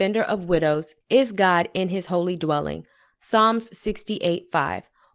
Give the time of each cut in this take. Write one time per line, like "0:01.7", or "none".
none